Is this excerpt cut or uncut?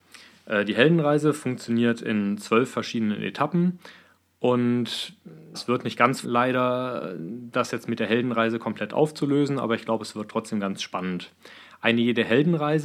cut